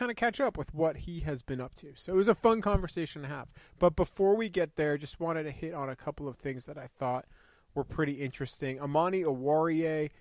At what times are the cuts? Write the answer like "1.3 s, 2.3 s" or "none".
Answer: none